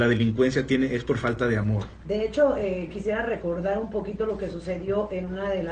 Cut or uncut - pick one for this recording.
uncut